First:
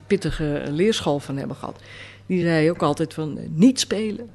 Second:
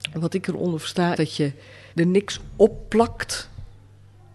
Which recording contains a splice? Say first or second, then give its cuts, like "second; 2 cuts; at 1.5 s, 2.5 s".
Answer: second; 2 cuts; at 1.2 s, 1.9 s